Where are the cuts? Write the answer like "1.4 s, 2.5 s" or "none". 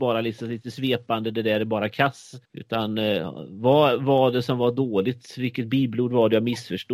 2.4 s